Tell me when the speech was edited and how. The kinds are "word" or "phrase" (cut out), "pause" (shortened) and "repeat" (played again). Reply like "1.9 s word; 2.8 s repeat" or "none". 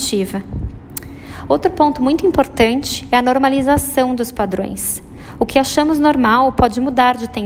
none